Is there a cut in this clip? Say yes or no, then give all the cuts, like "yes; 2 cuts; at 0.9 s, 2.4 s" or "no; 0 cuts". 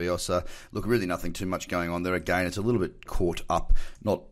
no; 0 cuts